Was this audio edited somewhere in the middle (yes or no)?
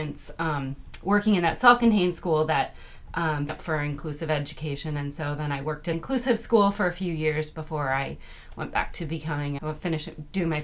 yes